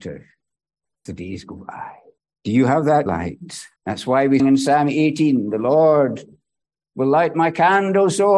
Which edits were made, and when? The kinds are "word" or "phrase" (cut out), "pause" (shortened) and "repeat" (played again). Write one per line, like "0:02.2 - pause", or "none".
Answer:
0:01.1 - word
0:02.2 - pause
0:03.1 - word
0:03.8 - pause
0:04.4 - word